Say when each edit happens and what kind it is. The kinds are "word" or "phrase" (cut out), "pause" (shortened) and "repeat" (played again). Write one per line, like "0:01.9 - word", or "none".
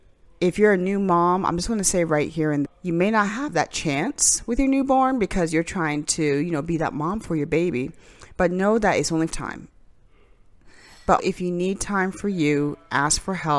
0:02.6 - word
0:09.3 - phrase
0:11.2 - word